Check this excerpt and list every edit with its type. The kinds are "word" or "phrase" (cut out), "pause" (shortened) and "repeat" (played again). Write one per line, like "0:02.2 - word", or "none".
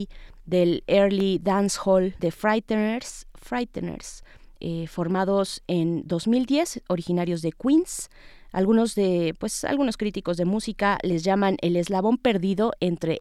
0:02.2 - phrase